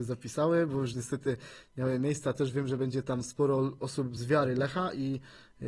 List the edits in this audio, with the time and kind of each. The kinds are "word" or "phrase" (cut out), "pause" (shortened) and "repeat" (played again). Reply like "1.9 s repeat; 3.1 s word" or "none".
none